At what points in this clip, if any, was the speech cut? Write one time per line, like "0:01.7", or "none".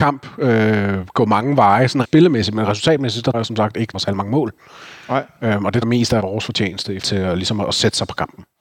0:02.0
0:03.3
0:03.9
0:05.8
0:06.2
0:07.0